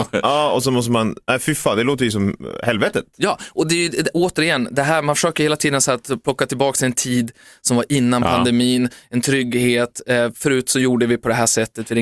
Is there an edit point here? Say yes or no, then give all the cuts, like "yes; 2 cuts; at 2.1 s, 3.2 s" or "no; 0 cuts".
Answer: no; 0 cuts